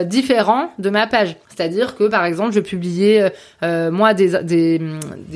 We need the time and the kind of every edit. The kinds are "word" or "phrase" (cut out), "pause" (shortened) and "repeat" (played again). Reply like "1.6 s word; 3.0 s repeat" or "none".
1.4 s pause